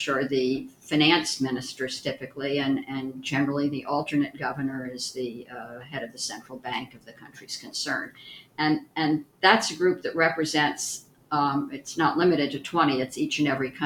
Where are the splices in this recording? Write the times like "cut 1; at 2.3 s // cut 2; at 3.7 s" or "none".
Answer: none